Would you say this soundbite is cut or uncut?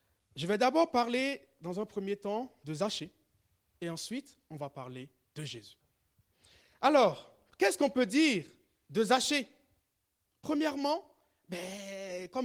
uncut